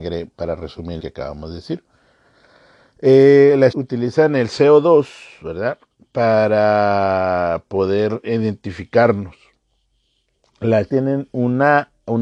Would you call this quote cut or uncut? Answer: cut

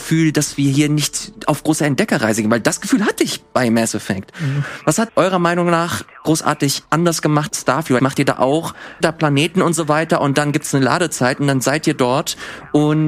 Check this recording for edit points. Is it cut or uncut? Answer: cut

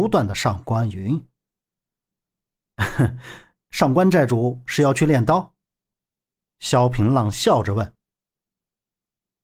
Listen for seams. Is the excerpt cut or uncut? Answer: uncut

